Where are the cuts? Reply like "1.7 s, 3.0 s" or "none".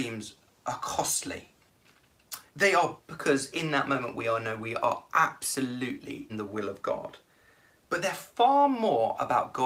2.5 s, 3.0 s, 6.3 s